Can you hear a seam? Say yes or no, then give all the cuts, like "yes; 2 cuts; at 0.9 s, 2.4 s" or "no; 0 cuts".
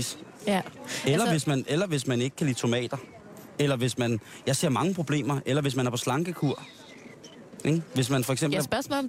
no; 0 cuts